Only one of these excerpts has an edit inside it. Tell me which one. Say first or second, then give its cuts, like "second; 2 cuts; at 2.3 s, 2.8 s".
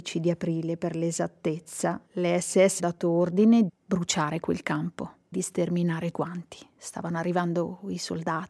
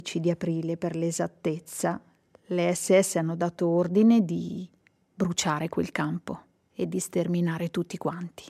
first; 5 cuts; at 2.1 s, 2.8 s, 3.7 s, 5.3 s, 6.1 s